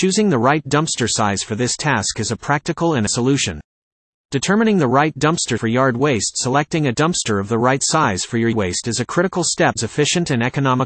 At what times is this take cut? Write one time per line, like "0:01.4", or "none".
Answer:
0:03.1
0:05.6
0:08.5
0:09.8